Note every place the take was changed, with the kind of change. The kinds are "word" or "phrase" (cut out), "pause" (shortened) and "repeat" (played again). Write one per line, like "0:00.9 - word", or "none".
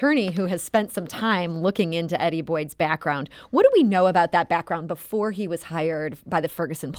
none